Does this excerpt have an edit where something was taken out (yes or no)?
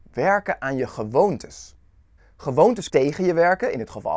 yes